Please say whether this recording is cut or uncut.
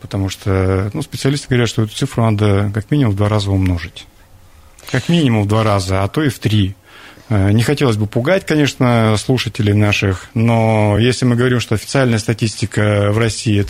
uncut